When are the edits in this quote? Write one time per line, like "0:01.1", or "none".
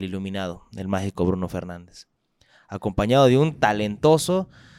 none